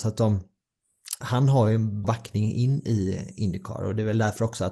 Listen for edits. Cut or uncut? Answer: cut